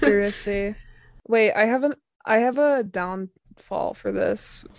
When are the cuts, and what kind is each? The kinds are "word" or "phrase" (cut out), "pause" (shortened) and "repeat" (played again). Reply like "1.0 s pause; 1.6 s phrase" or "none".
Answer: none